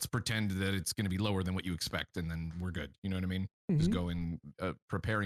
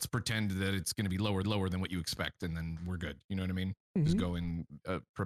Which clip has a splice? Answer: second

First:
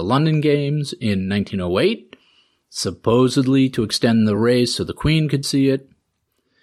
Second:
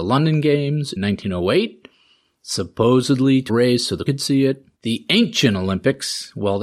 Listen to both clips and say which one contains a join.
second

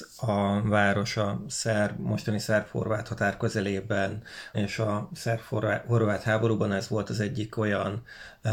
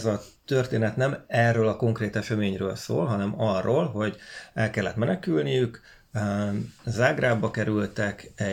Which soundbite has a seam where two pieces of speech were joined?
first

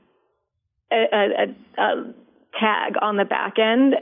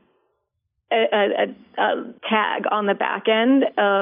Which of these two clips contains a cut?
second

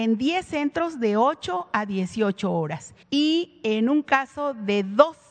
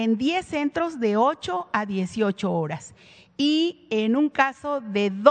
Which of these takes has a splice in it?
first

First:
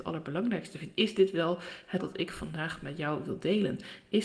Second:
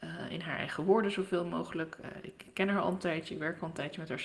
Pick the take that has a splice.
first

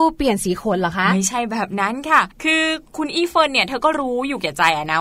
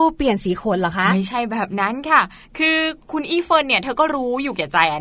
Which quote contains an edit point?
first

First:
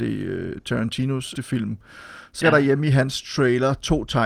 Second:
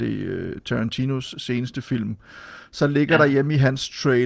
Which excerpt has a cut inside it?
first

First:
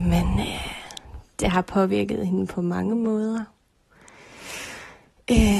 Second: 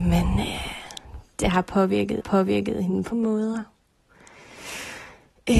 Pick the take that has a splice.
second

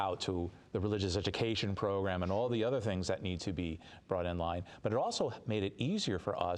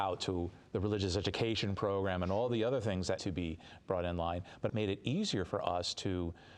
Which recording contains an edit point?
second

